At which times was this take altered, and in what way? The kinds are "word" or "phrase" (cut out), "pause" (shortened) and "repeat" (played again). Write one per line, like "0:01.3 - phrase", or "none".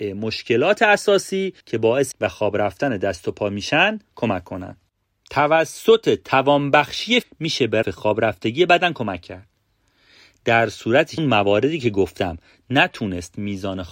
0:01.6 - pause
0:02.1 - word
0:07.2 - phrase
0:07.8 - word
0:11.2 - phrase